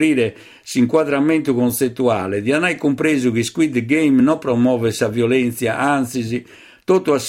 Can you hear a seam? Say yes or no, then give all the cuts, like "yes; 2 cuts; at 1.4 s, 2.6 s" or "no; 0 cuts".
no; 0 cuts